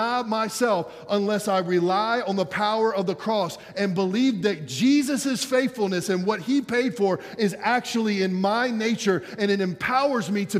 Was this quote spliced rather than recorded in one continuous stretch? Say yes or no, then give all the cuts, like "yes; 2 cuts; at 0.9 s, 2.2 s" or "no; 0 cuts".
no; 0 cuts